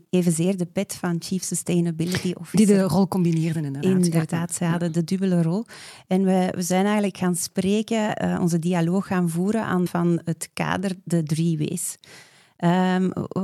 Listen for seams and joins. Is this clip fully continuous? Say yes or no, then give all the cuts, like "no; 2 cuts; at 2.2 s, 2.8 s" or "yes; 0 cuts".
no; 1 cut; at 9.9 s